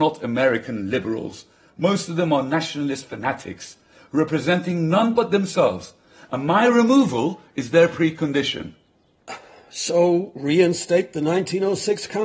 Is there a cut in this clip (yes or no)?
no